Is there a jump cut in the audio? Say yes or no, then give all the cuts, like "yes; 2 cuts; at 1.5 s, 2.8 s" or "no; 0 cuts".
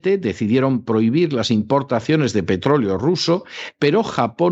no; 0 cuts